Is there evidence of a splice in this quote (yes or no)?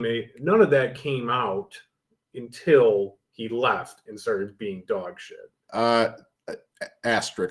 no